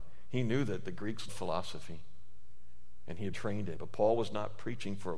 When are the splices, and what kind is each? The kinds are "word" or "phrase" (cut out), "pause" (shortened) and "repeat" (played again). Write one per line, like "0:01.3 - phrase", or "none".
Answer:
0:01.3 - word
0:03.3 - word
0:03.8 - word